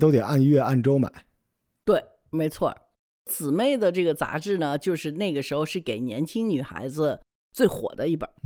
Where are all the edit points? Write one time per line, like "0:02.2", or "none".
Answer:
none